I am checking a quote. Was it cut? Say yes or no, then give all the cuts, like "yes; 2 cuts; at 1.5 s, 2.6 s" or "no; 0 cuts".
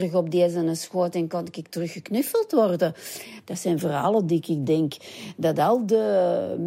no; 0 cuts